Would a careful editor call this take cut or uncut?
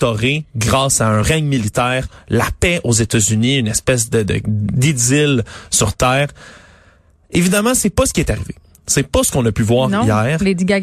uncut